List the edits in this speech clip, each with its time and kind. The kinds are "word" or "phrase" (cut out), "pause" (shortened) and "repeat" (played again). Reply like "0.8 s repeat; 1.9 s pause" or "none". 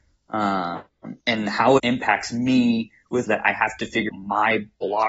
1.2 s pause; 1.8 s word; 3.3 s phrase; 4.1 s word